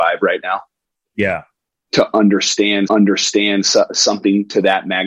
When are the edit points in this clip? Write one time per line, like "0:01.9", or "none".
0:02.9